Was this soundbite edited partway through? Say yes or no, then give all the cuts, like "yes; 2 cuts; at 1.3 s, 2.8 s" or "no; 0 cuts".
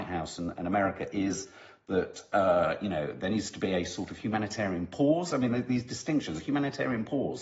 no; 0 cuts